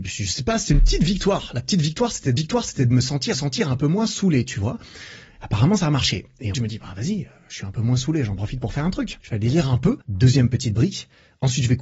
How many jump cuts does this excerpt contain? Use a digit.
5